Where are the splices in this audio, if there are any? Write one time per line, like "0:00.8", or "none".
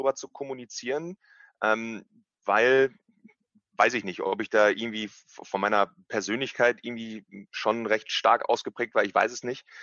none